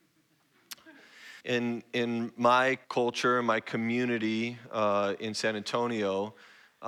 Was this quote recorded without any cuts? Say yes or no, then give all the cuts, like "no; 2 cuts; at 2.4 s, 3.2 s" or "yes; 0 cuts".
no; 2 cuts; at 1.4 s, 2.8 s